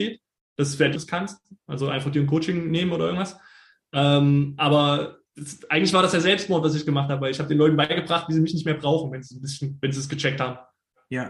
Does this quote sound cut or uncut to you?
cut